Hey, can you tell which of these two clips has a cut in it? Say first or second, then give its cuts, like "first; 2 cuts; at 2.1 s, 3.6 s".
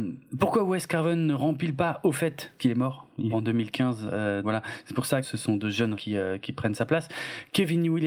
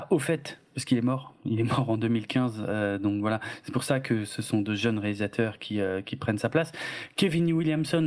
first; 5 cuts; at 2.6 s, 3.3 s, 4.4 s, 5.2 s, 5.9 s